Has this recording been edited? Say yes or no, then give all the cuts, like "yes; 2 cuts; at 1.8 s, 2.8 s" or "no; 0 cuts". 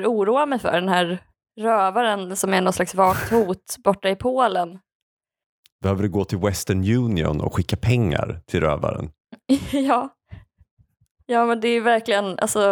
no; 0 cuts